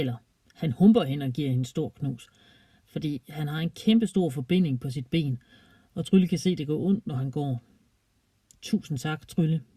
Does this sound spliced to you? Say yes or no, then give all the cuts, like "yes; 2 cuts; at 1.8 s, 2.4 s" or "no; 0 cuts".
no; 0 cuts